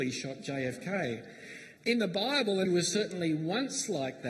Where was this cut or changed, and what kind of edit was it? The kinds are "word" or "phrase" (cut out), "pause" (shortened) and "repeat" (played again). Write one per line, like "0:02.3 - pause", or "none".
0:01.8 - pause
0:02.7 - word